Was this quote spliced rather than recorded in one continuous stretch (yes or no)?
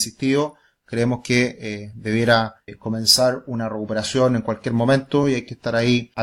no